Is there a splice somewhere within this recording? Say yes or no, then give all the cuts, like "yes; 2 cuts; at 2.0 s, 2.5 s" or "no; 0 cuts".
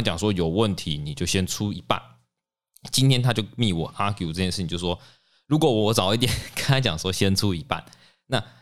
no; 0 cuts